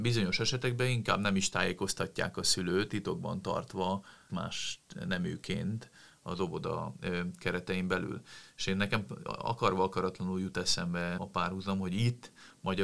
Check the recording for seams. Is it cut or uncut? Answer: cut